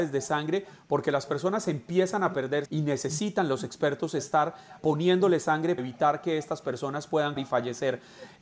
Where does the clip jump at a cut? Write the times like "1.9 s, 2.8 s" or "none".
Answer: 2.7 s, 4.8 s, 5.8 s, 7.4 s